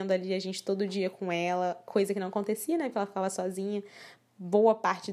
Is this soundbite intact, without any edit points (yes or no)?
yes